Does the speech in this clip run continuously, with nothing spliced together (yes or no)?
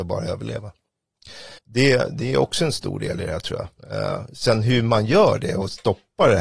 no